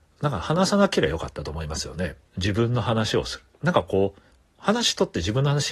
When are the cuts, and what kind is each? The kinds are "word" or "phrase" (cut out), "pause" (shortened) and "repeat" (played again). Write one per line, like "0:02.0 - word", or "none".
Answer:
0:02.3 - pause